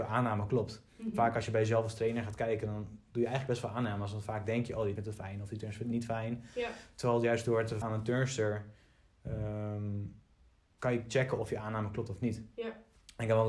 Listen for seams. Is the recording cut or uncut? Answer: cut